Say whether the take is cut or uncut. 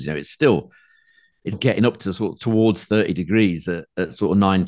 cut